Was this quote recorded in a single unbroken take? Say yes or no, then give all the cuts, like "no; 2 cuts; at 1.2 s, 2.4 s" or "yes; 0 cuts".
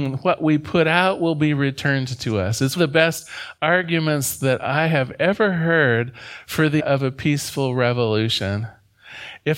no; 2 cuts; at 2.8 s, 6.8 s